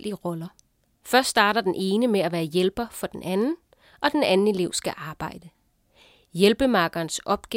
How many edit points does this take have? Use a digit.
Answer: 0